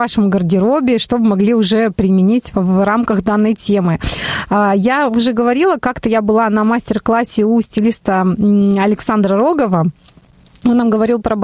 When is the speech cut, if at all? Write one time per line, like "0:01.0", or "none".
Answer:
0:02.5